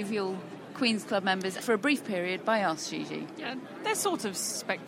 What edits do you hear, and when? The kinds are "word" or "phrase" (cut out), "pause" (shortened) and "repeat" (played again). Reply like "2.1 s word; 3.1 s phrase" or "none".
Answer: 1.6 s word